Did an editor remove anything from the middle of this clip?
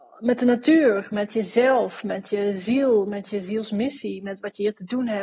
no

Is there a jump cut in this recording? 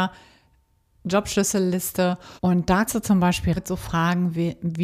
yes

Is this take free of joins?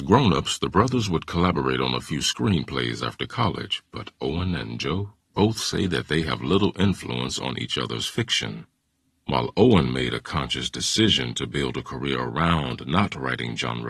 yes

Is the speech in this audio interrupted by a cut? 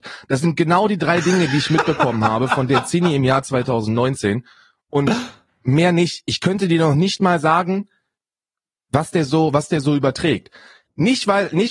no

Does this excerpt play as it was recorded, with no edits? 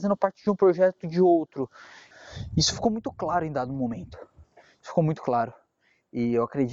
yes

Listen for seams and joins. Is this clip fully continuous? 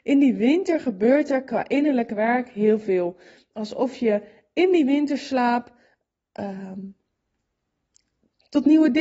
yes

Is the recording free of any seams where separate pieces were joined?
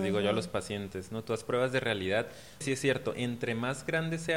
no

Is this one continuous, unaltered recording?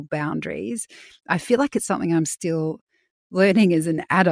yes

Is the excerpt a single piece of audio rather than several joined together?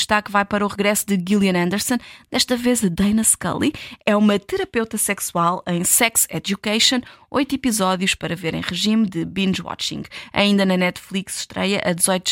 yes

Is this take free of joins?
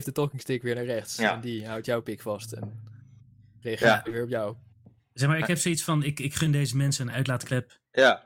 yes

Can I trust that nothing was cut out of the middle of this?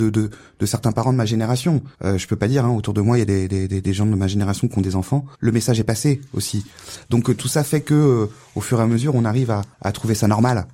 no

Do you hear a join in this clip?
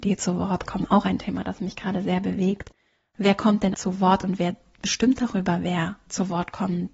yes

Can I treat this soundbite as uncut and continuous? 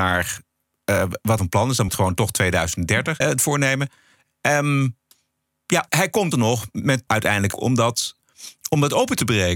no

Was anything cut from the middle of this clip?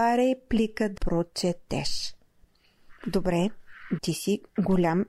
yes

